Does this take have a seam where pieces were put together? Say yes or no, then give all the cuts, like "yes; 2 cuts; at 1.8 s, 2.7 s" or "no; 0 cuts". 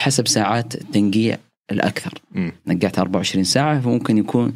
no; 0 cuts